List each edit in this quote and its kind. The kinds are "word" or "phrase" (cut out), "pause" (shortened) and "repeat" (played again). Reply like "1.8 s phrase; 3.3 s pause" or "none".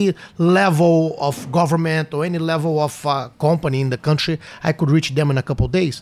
none

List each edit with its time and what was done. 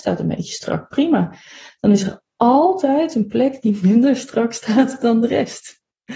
none

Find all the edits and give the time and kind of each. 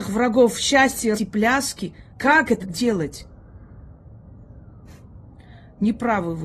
1.1 s word; 2.1 s pause; 2.6 s word

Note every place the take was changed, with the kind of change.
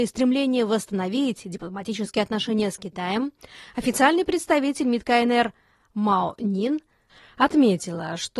none

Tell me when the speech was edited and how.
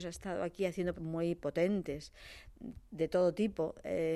0.9 s word

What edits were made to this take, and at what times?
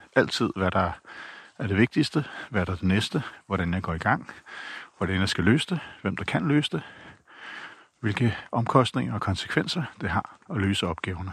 none

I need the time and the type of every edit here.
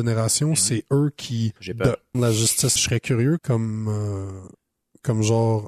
1.6 s pause; 2.1 s word; 2.8 s phrase; 3.4 s word

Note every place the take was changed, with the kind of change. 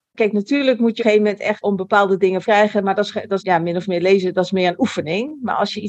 1.0 s phrase; 1.6 s word; 2.4 s phrase; 3.4 s word

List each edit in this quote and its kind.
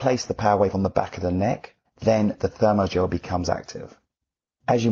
1.8 s pause

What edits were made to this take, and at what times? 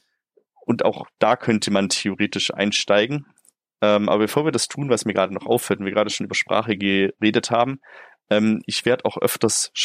none

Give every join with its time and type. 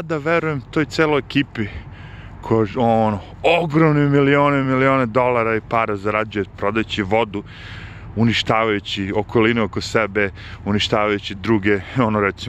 none

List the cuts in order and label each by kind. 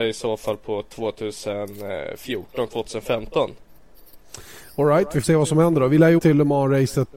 5.2 s word; 6.2 s word

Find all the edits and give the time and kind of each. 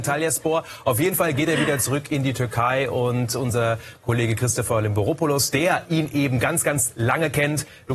none

